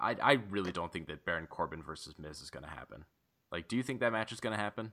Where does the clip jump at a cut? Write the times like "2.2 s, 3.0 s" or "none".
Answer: none

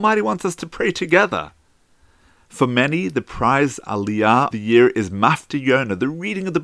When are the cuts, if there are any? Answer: 4.5 s

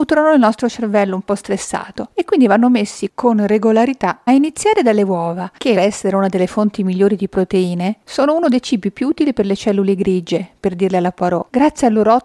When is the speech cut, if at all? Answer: 4.3 s, 5.8 s

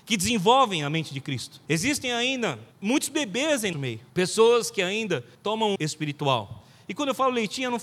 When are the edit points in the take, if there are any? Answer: 1.7 s, 2.7 s, 3.7 s, 4.1 s, 5.3 s, 5.8 s

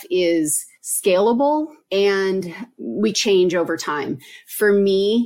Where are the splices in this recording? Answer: 3.1 s

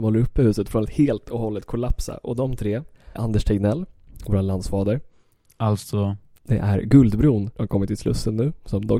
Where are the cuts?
3.2 s, 7.5 s

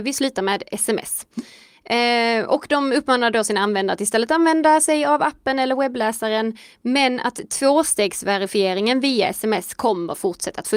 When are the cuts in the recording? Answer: none

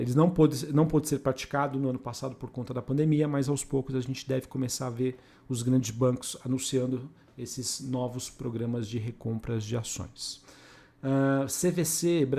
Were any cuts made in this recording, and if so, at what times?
none

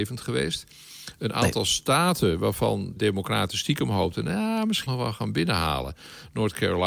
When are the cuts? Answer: 3.0 s, 4.9 s

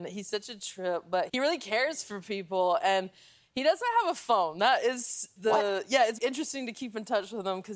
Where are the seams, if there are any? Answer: 1.3 s, 5.4 s, 6.2 s

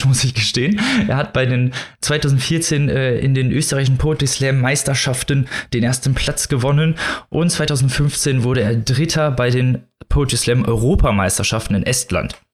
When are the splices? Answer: none

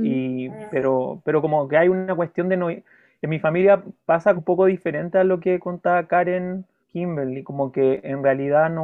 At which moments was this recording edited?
4.4 s, 6.8 s

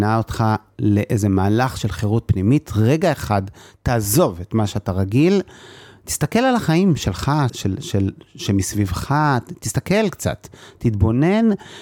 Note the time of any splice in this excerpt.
7.5 s

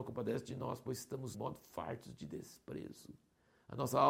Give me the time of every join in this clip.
1.3 s

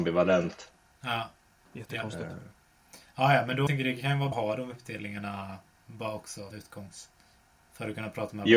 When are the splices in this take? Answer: 3.7 s, 4.3 s, 6.5 s

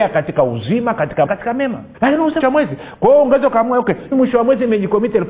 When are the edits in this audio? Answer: 1.3 s, 1.9 s, 2.4 s, 4.1 s

